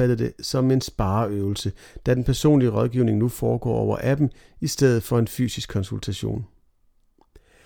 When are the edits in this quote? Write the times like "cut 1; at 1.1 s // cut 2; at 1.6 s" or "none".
none